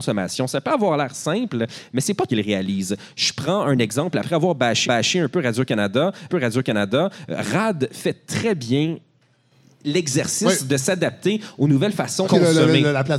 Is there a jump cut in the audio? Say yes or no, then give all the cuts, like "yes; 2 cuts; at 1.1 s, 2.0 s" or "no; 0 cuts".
yes; 4 cuts; at 2.3 s, 4.8 s, 6.3 s, 12.2 s